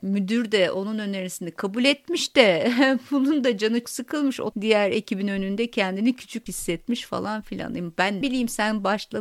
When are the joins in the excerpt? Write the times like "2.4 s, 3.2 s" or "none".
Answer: 3.8 s, 4.5 s, 6.5 s, 8.2 s